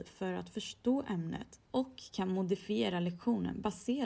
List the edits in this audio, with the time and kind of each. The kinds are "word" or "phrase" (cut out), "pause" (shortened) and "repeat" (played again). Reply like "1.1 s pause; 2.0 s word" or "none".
1.7 s pause